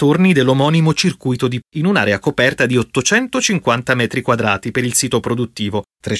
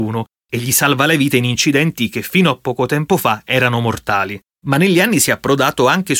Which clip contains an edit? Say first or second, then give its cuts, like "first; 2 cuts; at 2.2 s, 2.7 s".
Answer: first; 1 cut; at 1.6 s